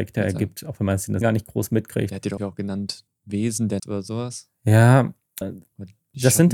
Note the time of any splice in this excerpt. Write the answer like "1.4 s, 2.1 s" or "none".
1.2 s, 2.4 s, 3.1 s, 3.8 s, 5.4 s